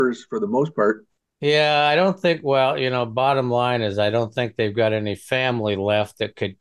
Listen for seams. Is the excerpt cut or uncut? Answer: uncut